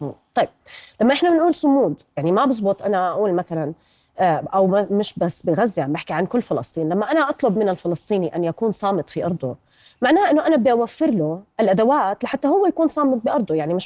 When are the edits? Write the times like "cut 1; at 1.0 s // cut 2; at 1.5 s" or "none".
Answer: none